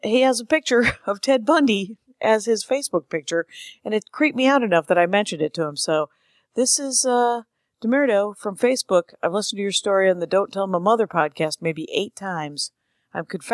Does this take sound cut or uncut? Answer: uncut